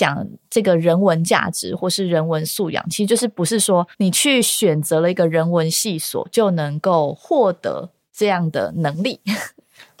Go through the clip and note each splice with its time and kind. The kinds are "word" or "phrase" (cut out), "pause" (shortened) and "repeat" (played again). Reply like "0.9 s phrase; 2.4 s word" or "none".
3.9 s pause

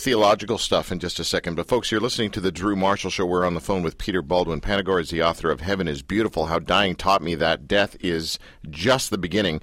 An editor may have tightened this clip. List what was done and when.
none

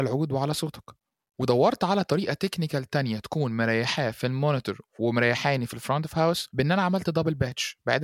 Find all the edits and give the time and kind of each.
none

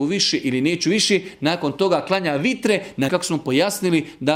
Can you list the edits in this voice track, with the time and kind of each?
3.1 s word

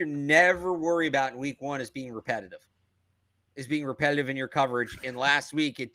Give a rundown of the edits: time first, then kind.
none

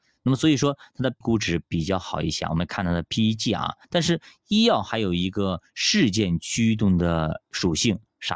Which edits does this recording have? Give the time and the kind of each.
1.2 s word; 3.8 s pause

